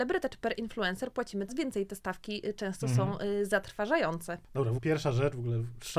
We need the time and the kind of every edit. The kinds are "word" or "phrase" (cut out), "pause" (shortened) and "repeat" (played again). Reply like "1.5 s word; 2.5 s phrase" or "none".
1.5 s word; 4.8 s word